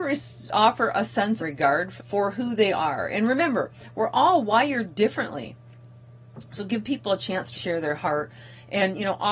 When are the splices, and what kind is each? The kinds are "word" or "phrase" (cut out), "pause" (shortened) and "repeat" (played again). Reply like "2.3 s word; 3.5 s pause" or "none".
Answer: 1.4 s phrase; 2.0 s word; 7.5 s word